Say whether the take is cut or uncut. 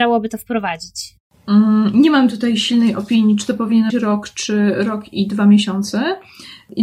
cut